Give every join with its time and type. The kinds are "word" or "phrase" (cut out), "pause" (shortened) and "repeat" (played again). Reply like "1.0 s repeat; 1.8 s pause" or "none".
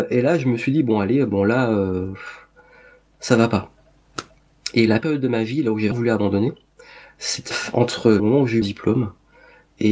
5.0 s word; 5.9 s word; 7.5 s word; 8.2 s word; 8.6 s word